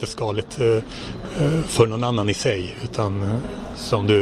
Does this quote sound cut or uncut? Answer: uncut